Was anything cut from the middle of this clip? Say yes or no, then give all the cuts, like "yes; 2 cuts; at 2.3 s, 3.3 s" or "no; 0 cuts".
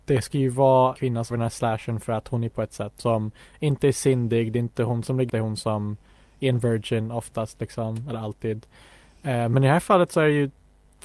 yes; 5 cuts; at 1.0 s, 1.3 s, 2.5 s, 3.0 s, 5.3 s